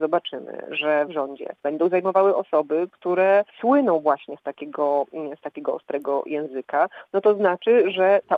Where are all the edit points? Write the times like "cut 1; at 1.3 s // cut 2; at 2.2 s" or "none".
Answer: cut 1; at 1.1 s // cut 2; at 1.6 s // cut 3; at 3.5 s